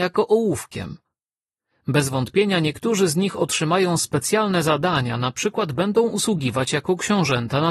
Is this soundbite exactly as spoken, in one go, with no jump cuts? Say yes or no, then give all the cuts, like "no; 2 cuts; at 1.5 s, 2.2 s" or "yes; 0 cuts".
yes; 0 cuts